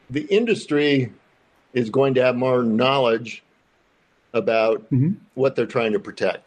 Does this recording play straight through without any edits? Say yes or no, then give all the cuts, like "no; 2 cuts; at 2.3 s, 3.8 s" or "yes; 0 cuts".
yes; 0 cuts